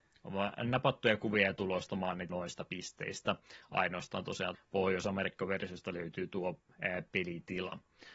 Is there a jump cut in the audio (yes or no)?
yes